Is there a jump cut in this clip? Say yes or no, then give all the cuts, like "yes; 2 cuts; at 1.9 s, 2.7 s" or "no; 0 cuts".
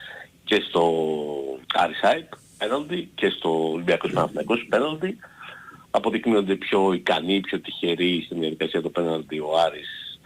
yes; 1 cut; at 1.6 s